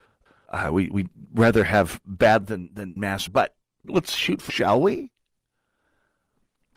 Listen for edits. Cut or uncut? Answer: cut